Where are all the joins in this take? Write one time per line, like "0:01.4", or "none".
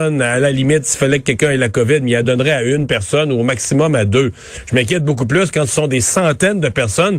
none